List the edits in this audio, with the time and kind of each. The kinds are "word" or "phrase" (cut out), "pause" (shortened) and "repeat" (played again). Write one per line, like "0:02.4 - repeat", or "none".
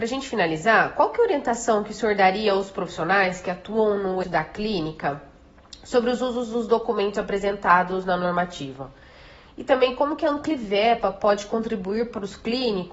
0:04.2 - word

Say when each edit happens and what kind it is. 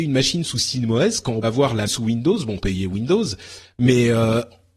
0:01.4 - word
0:01.9 - word
0:02.6 - word

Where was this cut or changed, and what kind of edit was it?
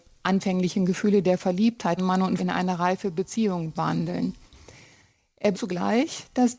0:02.0 - word
0:02.4 - word
0:03.7 - word
0:05.5 - word

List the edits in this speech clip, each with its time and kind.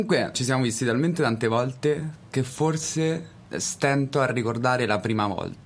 none

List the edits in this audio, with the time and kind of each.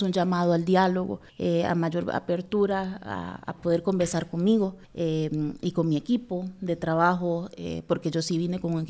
0:01.3 - pause
0:04.8 - pause

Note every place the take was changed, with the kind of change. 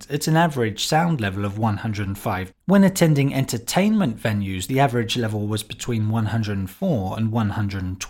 0:02.5 - word

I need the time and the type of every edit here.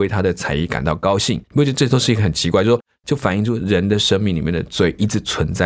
0:01.4 - pause

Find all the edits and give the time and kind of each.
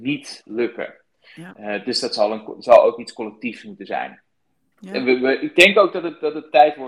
none

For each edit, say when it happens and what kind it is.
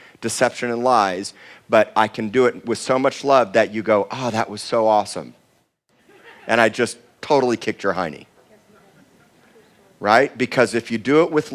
none

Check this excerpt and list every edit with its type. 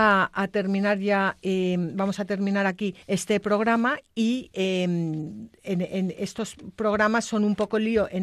0:03.0 - pause

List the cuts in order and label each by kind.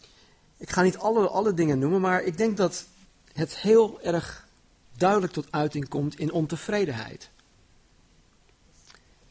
0:03.1 - pause

